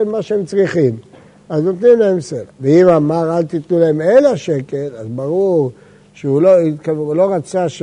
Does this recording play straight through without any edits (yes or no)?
yes